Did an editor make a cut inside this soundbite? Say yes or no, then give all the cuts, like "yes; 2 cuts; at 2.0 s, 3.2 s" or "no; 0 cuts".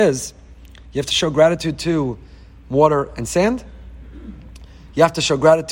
no; 0 cuts